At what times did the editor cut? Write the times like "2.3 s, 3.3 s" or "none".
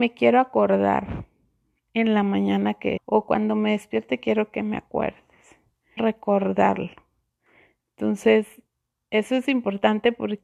3.0 s, 6.0 s